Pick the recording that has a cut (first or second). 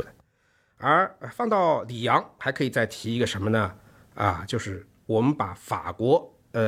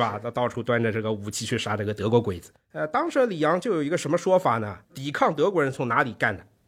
second